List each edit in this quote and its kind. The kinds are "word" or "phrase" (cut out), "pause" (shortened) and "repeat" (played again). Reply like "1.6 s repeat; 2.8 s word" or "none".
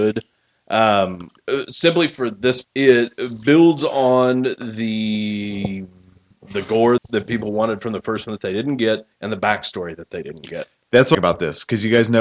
1.4 s pause; 2.6 s word; 7.0 s word; 9.1 s pause; 11.1 s phrase